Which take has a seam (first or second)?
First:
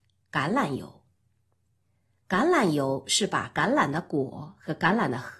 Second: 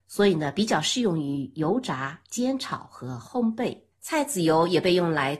second